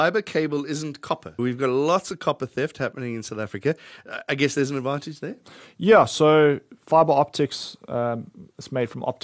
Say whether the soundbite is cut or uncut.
cut